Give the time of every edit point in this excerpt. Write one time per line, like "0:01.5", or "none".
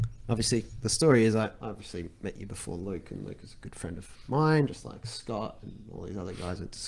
none